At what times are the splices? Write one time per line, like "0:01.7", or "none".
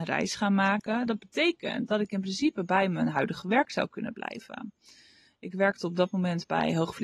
none